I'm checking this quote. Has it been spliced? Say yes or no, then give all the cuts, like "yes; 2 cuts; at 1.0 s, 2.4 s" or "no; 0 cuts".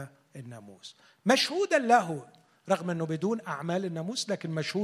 no; 0 cuts